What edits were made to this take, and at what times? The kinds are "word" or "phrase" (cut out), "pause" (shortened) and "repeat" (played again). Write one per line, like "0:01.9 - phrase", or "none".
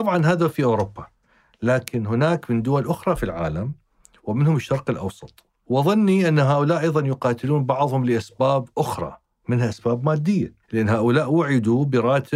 none